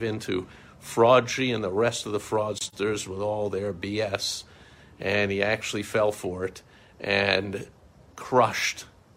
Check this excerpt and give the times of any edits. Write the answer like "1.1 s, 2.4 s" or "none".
none